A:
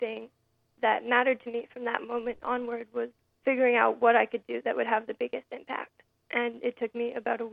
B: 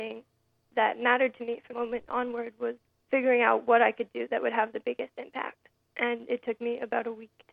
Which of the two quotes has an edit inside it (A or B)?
B